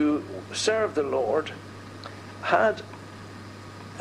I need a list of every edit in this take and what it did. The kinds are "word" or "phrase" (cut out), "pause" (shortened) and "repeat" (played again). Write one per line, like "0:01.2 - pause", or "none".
none